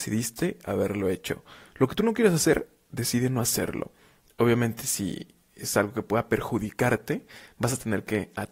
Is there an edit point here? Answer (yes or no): no